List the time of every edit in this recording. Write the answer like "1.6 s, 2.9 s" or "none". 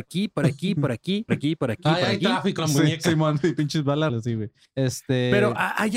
1.3 s, 2.6 s, 4.1 s, 4.6 s